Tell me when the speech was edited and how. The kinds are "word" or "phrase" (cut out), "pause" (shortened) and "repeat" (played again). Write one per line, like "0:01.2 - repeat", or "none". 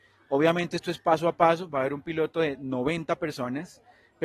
none